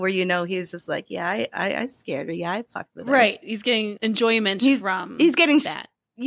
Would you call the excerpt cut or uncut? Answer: uncut